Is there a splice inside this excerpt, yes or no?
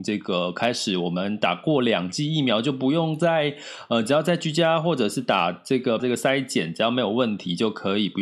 yes